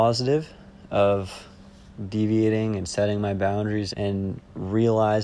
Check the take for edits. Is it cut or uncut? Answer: cut